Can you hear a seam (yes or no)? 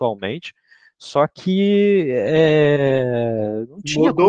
no